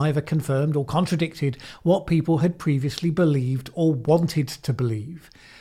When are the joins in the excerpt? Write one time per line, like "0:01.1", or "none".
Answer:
none